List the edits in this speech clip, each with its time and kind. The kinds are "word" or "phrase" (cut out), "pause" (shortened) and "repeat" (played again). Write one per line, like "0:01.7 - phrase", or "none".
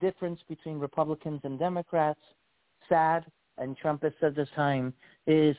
0:03.6 - word
0:04.5 - word